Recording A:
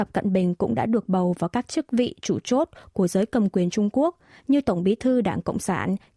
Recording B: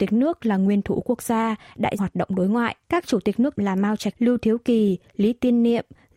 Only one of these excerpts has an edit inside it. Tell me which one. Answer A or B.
B